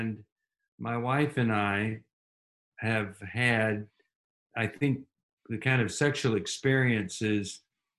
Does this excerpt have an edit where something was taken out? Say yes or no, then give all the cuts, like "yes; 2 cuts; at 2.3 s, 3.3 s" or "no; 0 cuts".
no; 0 cuts